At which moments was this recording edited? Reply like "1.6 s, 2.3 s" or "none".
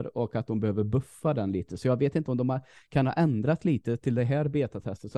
none